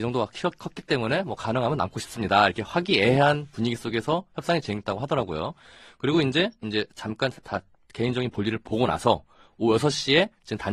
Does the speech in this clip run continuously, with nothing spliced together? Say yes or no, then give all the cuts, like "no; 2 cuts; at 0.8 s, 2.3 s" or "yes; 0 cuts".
yes; 0 cuts